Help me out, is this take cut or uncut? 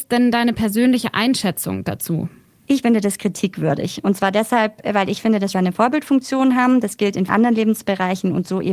cut